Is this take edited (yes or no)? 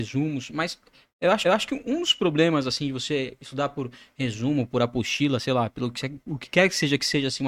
yes